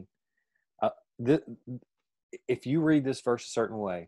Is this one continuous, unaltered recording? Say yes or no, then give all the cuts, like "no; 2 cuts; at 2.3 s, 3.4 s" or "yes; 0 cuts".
yes; 0 cuts